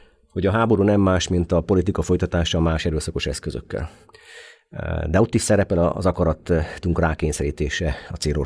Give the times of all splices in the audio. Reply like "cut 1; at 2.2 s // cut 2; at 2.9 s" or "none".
none